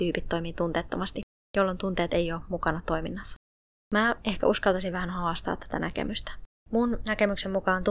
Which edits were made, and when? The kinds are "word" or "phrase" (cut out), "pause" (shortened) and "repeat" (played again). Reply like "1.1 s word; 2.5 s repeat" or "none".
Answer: none